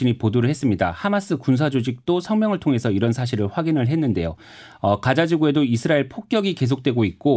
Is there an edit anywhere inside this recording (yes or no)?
no